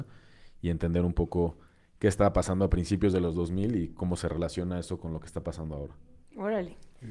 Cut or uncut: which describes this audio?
uncut